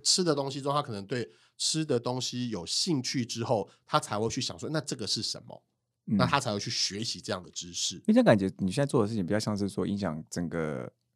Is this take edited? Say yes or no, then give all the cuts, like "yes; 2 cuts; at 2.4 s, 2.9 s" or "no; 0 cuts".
no; 0 cuts